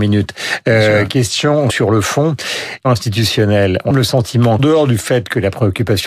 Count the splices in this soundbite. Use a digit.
4